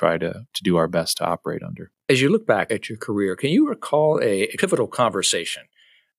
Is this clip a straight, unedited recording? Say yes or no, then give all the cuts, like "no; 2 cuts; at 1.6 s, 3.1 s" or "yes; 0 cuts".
no; 1 cut; at 2.0 s